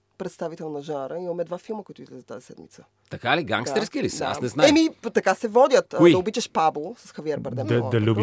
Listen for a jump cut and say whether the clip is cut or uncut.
uncut